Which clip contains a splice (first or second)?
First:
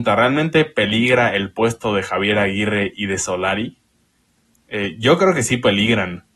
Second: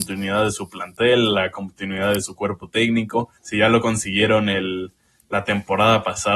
second